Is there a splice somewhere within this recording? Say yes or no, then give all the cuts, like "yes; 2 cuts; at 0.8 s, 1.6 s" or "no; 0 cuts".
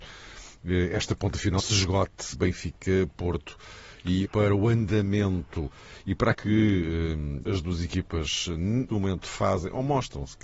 yes; 6 cuts; at 1.6 s, 2.3 s, 4.2 s, 6.3 s, 7.4 s, 8.9 s